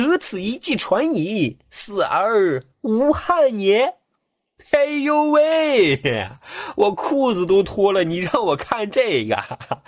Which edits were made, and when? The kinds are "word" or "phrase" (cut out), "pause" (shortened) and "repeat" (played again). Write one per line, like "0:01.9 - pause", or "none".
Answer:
0:02.7 - pause